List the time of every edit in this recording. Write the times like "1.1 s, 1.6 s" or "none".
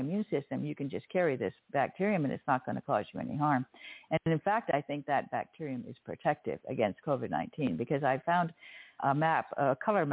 9.0 s